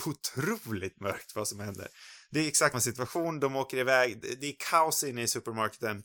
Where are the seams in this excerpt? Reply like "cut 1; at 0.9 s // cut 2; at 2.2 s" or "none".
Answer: cut 1; at 2.7 s